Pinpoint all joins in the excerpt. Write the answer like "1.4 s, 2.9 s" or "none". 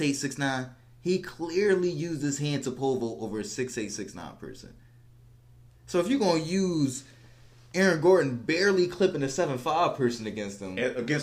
none